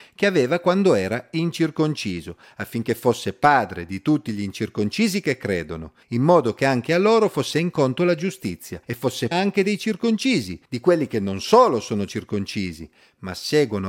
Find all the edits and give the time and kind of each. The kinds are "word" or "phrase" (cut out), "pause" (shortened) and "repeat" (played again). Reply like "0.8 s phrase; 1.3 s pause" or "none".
6.0 s pause; 7.5 s word; 8.8 s pause; 9.3 s word; 10.6 s pause